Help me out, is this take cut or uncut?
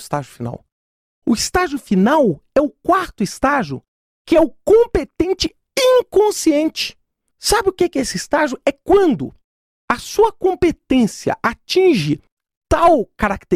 uncut